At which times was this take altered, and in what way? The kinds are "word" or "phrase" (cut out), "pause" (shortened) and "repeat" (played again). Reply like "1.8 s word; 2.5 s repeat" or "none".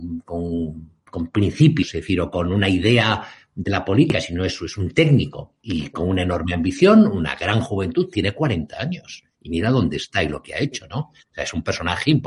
1.0 s pause